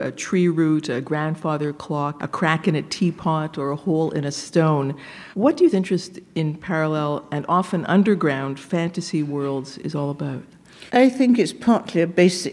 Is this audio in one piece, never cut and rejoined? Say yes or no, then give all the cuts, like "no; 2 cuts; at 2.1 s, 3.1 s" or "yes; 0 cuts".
no; 5 cuts; at 2.2 s, 5.3 s, 5.7 s, 9.8 s, 10.9 s